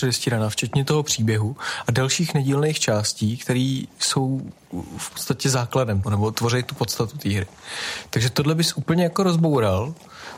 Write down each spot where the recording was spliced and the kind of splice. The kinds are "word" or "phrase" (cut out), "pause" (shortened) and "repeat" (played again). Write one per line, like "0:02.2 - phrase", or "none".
0:06.0 - word